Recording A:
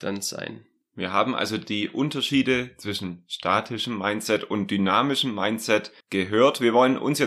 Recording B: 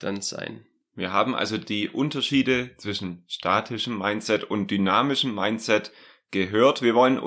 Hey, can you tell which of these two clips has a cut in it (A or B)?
A